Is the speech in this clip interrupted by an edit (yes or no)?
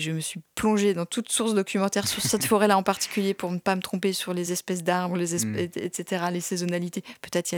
no